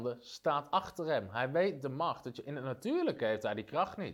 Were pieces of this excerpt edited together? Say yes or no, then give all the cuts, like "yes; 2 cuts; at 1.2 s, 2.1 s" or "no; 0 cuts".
no; 0 cuts